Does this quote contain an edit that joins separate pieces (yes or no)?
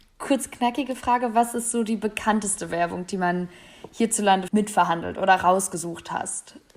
yes